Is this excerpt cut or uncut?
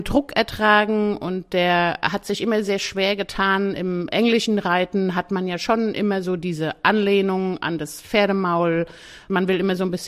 uncut